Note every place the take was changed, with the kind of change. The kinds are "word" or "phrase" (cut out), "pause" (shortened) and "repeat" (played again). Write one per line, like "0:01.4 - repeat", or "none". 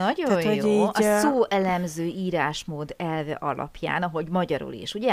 none